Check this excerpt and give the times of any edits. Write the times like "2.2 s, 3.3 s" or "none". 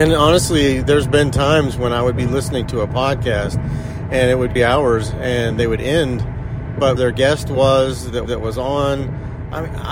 4.6 s, 7.0 s, 8.3 s